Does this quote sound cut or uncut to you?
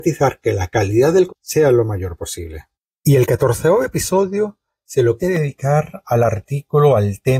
cut